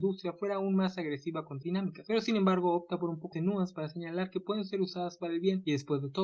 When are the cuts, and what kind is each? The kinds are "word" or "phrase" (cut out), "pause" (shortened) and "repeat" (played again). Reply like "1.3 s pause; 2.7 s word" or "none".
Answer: 1.6 s word; 3.3 s word